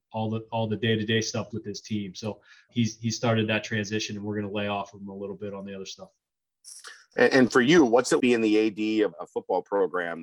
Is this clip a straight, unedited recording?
no; 4 cuts; at 1.5 s, 2.7 s, 8.2 s, 9.1 s

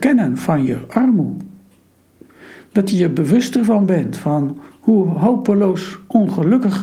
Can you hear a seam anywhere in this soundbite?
no; 0 cuts

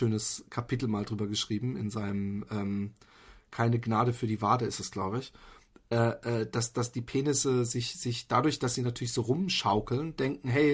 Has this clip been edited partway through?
no; 0 cuts

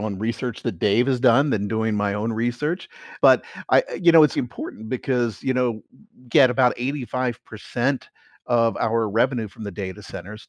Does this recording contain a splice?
yes; 3 cuts; at 3.2 s, 4.4 s, 6.3 s

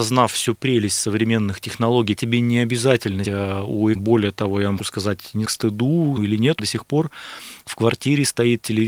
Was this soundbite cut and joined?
yes; 7 cuts; at 2.2 s, 3.2 s, 3.9 s, 4.8 s, 5.4 s, 6.2 s, 6.6 s

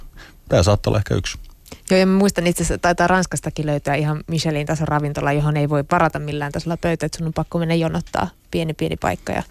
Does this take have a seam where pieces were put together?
no; 0 cuts

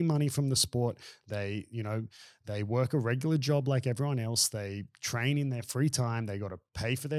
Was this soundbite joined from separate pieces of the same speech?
no; 0 cuts

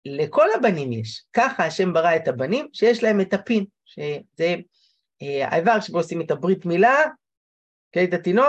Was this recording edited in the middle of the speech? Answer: no; 0 cuts

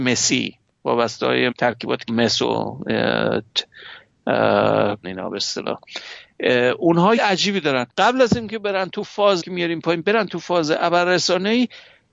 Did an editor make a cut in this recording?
yes; 6 cuts; at 1.5 s, 2.1 s, 5.0 s, 7.2 s, 7.9 s, 9.4 s

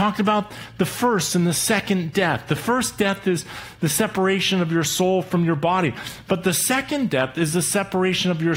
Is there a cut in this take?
no; 0 cuts

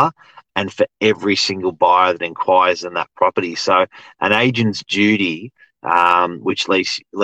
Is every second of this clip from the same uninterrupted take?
yes; 0 cuts

